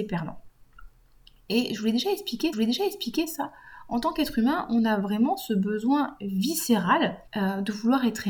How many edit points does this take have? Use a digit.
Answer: 2